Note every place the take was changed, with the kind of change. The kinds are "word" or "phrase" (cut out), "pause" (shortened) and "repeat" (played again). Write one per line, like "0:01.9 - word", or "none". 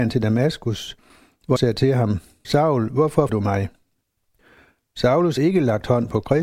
0:01.6 - word
0:02.4 - word
0:03.3 - word
0:05.4 - word